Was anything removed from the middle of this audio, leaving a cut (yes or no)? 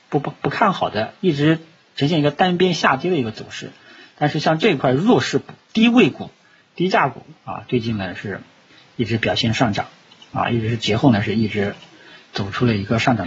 no